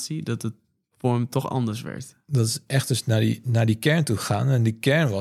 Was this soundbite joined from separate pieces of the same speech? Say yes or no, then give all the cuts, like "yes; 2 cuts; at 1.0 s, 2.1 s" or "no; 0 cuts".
no; 0 cuts